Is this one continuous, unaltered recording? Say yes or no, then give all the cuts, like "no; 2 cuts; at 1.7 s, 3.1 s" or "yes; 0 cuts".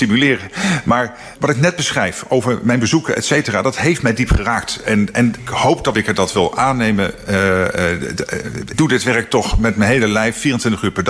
no; 4 cuts; at 1.3 s, 5.4 s, 5.9 s, 8.7 s